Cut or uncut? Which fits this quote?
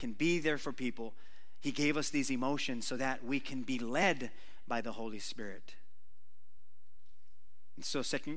uncut